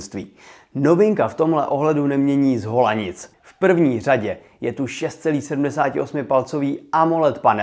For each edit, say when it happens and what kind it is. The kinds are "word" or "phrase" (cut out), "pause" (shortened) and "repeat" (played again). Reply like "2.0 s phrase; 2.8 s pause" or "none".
3.3 s pause